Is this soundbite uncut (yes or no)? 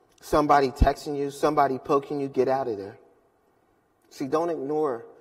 yes